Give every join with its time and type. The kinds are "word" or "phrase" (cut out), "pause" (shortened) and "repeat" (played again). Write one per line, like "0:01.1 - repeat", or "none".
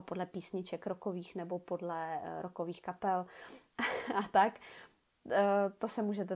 none